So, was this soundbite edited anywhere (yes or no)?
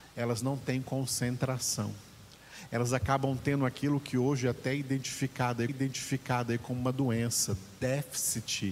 yes